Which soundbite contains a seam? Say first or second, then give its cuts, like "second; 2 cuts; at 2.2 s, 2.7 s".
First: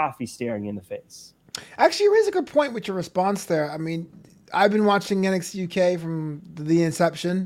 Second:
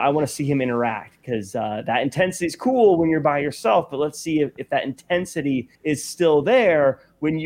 second; 1 cut; at 5.7 s